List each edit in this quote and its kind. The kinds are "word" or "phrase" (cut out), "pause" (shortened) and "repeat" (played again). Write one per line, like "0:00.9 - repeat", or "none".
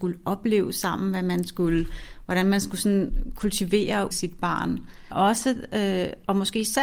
0:04.1 - word
0:05.1 - word